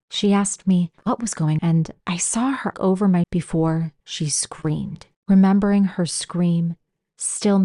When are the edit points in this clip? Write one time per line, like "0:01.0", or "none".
0:01.0
0:01.6
0:02.0
0:02.7
0:03.2
0:04.0
0:05.1